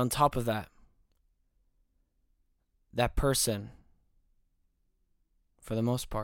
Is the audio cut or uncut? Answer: uncut